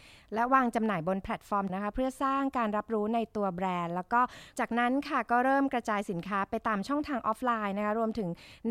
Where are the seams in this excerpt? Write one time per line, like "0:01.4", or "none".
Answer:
0:01.7